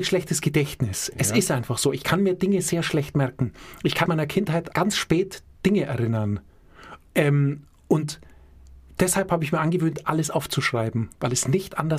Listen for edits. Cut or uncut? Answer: cut